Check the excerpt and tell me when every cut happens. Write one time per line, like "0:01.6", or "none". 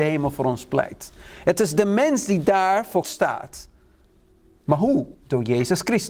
0:03.0
0:05.1